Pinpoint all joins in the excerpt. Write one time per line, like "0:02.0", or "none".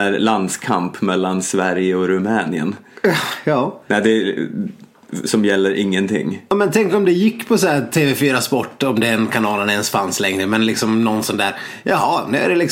none